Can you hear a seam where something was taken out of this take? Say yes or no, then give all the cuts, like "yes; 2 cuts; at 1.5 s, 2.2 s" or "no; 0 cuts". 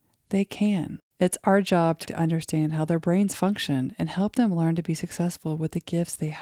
yes; 2 cuts; at 1.1 s, 2.0 s